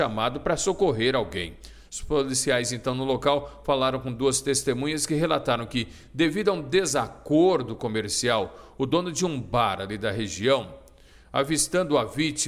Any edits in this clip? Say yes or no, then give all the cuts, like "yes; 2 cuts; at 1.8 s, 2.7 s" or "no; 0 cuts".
no; 0 cuts